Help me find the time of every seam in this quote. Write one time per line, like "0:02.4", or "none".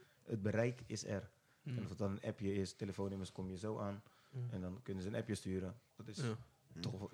none